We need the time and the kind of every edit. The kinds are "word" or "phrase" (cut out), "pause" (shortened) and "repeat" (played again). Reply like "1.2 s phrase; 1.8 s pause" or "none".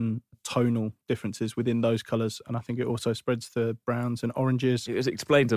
none